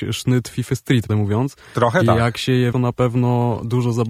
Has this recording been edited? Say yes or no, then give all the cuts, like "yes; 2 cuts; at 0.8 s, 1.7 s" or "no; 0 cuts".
yes; 2 cuts; at 1.1 s, 2.7 s